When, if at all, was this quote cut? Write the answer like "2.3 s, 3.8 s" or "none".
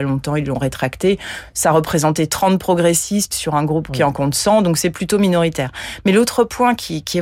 none